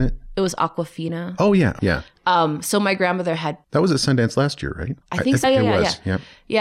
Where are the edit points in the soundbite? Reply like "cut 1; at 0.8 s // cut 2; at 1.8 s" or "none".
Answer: cut 1; at 1.8 s // cut 2; at 3.6 s // cut 3; at 5.0 s // cut 4; at 5.4 s

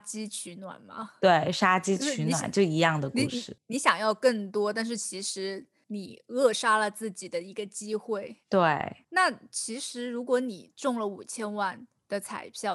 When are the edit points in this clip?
cut 1; at 8.4 s

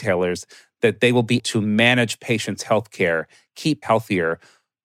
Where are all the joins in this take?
cut 1; at 1.4 s // cut 2; at 3.8 s

